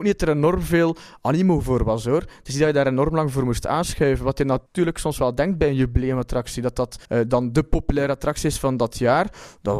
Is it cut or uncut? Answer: cut